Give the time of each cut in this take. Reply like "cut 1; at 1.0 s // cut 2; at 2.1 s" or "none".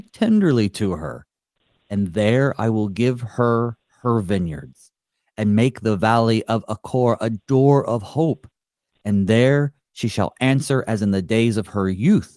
none